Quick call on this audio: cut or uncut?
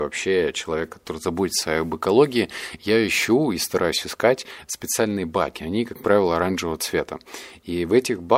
uncut